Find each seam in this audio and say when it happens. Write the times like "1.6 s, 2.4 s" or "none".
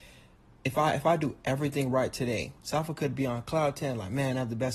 2.6 s

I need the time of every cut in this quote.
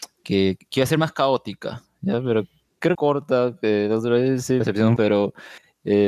2.9 s, 4.6 s, 5.0 s

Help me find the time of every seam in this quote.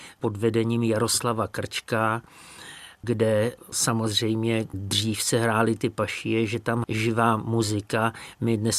4.7 s, 6.8 s

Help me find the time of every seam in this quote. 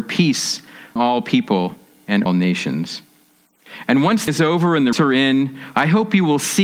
1.0 s, 2.3 s, 4.3 s, 4.9 s

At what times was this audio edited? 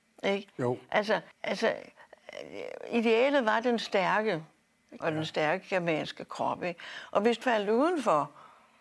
1.3 s, 5.0 s, 7.4 s

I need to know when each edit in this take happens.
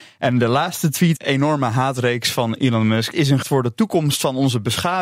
1.2 s, 3.1 s, 3.4 s

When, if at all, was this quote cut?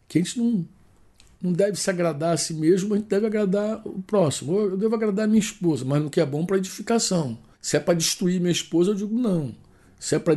7.5 s

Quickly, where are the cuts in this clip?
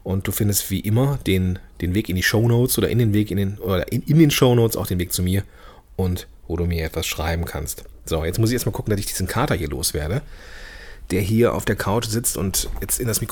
none

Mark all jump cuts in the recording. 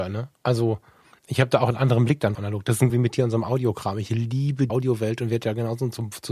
2.3 s, 2.9 s, 4.7 s

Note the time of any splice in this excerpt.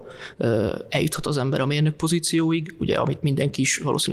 none

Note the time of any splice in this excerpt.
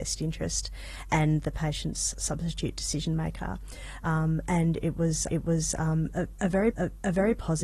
5.3 s, 6.7 s

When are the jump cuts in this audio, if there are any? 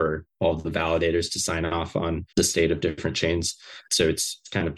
2.3 s

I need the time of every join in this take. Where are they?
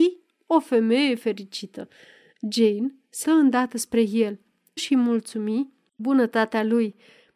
3.2 s, 4.8 s, 6.0 s

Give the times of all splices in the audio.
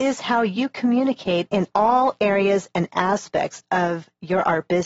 none

